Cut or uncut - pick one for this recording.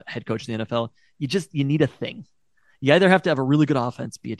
uncut